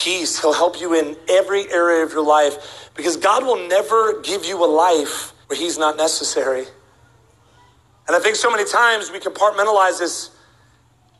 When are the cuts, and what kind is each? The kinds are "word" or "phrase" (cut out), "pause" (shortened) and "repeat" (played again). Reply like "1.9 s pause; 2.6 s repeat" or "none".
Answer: 5.4 s pause